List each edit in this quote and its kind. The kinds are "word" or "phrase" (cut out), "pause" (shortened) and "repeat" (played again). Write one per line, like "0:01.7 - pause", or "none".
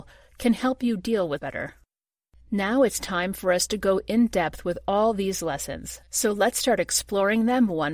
0:01.4 - word